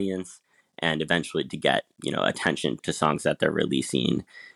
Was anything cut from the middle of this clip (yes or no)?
no